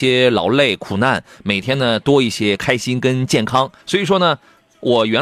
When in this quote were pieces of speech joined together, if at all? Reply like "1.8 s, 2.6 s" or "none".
3.8 s